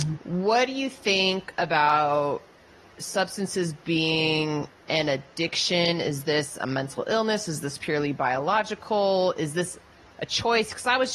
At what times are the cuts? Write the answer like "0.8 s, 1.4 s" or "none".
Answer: none